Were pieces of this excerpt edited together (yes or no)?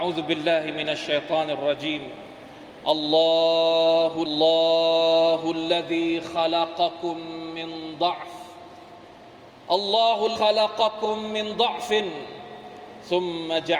yes